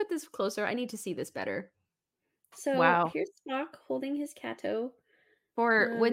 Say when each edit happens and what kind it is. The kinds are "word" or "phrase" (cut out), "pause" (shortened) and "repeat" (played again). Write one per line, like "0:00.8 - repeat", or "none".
none